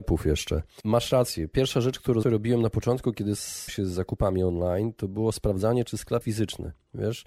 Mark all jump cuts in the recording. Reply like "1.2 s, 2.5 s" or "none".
2.2 s, 3.7 s, 6.2 s